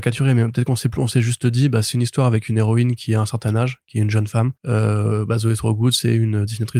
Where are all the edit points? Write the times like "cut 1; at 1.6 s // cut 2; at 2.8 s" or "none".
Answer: cut 1; at 4.6 s

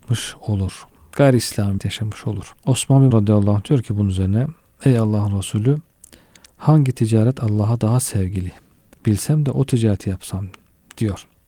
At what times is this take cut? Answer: cut 1; at 1.8 s // cut 2; at 2.6 s // cut 3; at 3.1 s

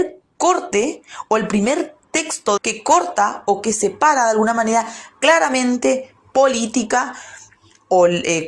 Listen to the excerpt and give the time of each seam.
cut 1; at 2.6 s // cut 2; at 5.1 s

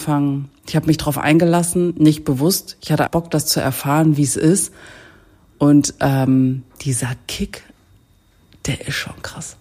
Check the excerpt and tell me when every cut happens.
cut 1; at 3.1 s

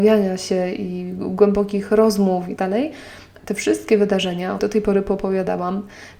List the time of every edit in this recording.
cut 1; at 2.6 s // cut 2; at 3.4 s // cut 3; at 4.6 s

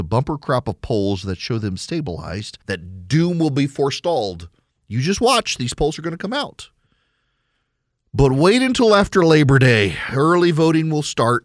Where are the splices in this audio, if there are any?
cut 1; at 2.6 s

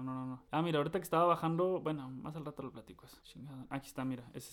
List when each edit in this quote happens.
none

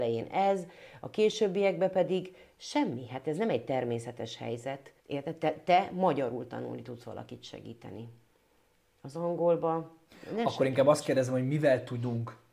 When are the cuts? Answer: cut 1; at 5.0 s

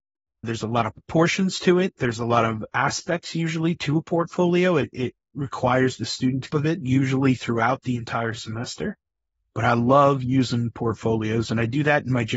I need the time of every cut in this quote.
cut 1; at 6.5 s

